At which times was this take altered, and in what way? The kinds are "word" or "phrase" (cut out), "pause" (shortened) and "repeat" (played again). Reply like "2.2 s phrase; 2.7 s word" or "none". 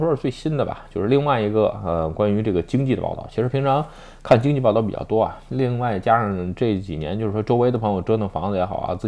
none